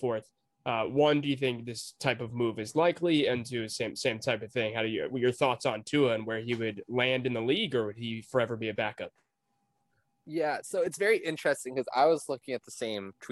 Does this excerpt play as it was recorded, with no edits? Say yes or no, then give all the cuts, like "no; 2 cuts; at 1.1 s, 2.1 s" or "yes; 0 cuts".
yes; 0 cuts